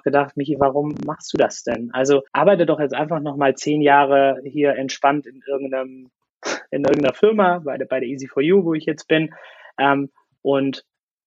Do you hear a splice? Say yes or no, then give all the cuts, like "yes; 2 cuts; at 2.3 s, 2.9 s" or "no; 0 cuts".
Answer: yes; 1 cut; at 2.3 s